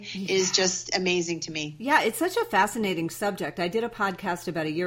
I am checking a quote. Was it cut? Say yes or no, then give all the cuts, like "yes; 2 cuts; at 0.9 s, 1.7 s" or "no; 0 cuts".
no; 0 cuts